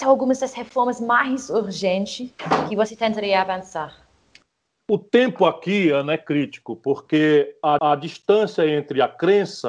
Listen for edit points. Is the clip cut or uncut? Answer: cut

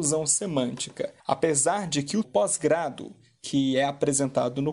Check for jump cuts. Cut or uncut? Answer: cut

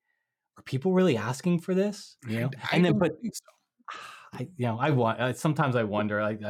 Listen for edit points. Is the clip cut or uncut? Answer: cut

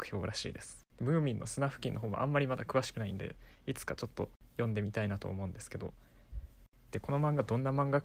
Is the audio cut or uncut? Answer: cut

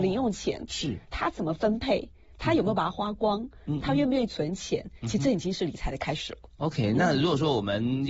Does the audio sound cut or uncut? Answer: uncut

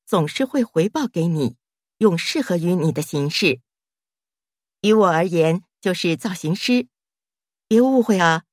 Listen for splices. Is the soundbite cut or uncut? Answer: uncut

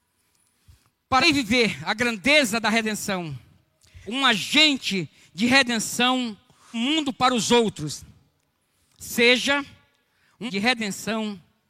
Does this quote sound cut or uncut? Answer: cut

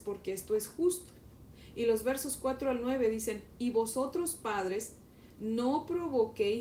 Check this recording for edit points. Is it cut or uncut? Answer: uncut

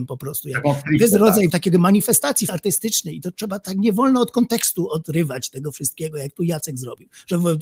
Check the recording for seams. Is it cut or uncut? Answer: cut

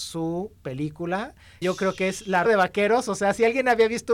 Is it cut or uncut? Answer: cut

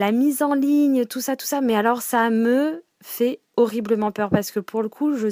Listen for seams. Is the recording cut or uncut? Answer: uncut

